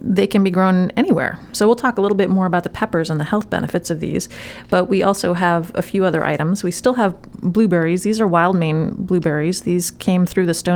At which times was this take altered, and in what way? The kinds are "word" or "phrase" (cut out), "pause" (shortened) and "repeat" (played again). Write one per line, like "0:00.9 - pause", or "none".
none

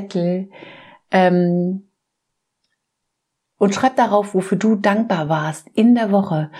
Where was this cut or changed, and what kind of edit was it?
none

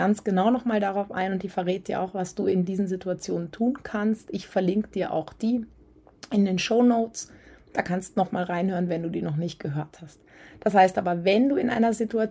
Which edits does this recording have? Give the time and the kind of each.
none

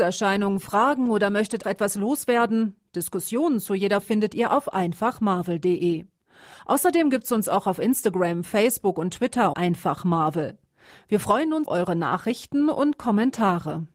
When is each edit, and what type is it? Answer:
0:01.6 - word
0:04.0 - word
0:09.5 - word
0:11.7 - word

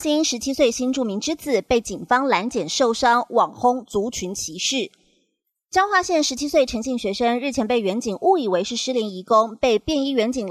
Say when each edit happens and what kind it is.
none

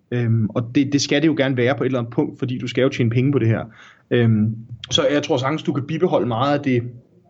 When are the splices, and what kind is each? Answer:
none

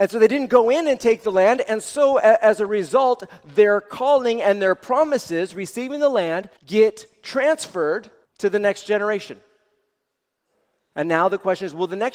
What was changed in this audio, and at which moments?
0:06.6 - pause
0:08.2 - pause

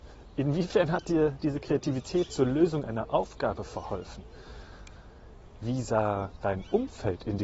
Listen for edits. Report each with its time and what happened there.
none

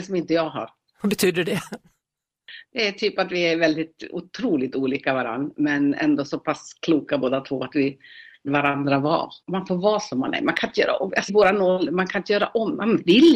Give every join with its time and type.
0:08.5 - word
0:09.4 - pause
0:11.3 - word

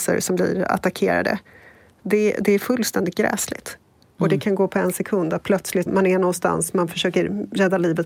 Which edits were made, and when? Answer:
0:05.9 - word

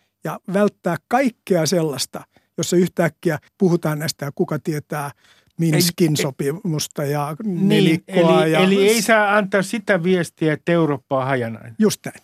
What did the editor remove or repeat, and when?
0:03.5 - pause
0:04.2 - word
0:05.2 - pause

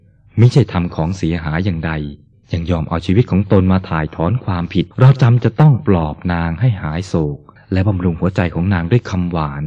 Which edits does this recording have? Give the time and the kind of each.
0:02.3 - pause
0:04.9 - pause
0:07.6 - pause

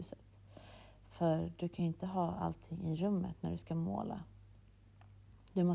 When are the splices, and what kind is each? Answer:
none

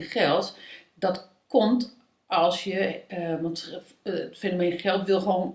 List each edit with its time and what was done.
none

